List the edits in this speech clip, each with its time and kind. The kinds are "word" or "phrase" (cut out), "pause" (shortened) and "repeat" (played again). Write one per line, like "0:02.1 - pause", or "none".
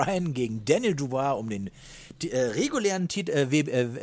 none